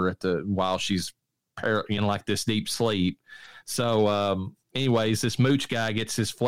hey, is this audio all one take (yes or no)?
no